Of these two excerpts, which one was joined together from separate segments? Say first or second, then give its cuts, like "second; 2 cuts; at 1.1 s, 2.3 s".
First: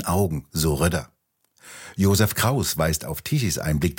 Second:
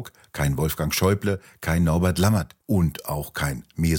second; 1 cut; at 2.6 s